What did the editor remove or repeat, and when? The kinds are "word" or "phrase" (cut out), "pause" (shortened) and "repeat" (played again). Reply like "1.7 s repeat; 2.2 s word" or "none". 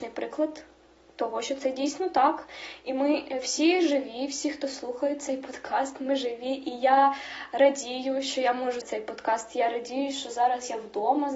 8.8 s word